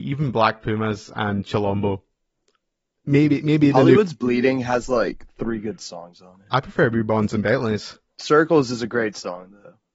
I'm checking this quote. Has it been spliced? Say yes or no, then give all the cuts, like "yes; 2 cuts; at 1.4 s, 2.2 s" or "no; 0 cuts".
no; 0 cuts